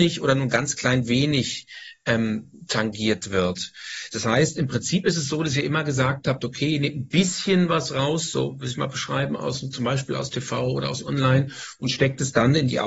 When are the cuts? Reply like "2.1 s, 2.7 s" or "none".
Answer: none